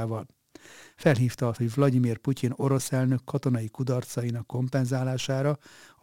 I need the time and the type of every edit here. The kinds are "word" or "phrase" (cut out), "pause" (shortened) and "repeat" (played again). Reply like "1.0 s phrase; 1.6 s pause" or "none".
1.6 s word